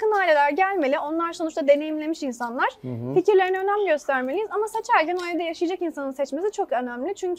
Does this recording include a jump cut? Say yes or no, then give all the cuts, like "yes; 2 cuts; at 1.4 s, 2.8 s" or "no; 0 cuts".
no; 0 cuts